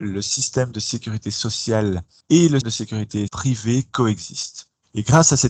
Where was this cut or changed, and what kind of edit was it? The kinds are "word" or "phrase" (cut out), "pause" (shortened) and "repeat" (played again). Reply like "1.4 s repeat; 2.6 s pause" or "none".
2.2 s word; 2.6 s word; 3.3 s word